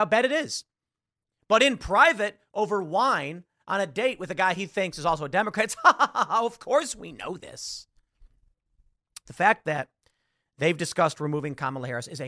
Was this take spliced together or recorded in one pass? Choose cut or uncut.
uncut